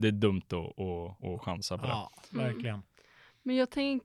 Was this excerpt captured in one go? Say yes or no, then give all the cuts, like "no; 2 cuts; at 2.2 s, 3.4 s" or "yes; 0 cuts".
no; 1 cut; at 1.2 s